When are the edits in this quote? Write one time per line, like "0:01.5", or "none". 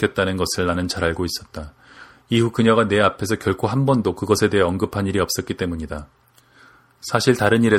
none